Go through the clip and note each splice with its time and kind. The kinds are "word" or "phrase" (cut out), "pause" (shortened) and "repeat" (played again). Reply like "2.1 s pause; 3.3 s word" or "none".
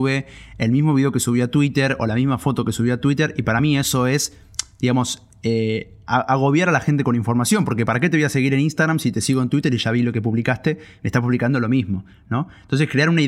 none